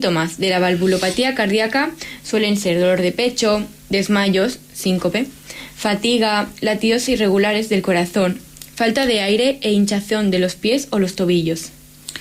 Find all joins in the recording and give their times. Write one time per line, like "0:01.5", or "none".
none